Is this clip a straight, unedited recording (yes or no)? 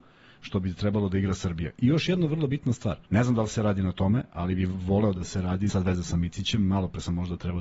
no